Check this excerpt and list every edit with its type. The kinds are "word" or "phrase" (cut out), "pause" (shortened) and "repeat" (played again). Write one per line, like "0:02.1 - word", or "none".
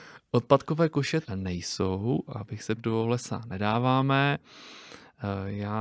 0:01.2 - word
0:02.8 - phrase